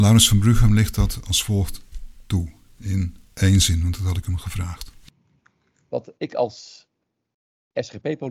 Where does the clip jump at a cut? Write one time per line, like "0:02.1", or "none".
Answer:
none